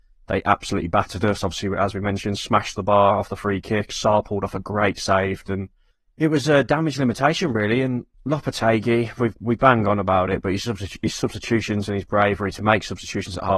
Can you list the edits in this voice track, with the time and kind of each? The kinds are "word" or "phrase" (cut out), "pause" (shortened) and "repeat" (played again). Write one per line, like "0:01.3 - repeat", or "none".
0:05.9 - pause
0:08.1 - pause
0:09.4 - pause